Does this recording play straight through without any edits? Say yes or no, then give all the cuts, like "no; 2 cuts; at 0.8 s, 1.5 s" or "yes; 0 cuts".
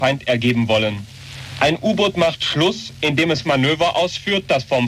no; 1 cut; at 3.4 s